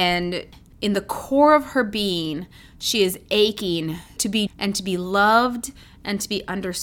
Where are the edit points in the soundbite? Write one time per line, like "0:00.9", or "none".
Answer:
0:04.2
0:04.5